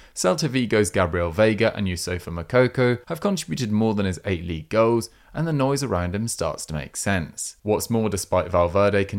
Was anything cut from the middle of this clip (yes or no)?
yes